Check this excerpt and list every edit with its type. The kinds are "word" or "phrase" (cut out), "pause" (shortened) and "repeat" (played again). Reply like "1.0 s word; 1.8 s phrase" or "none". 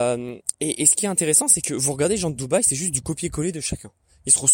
none